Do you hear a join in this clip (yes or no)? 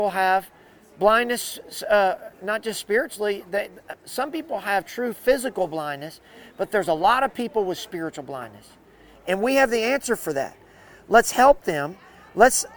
no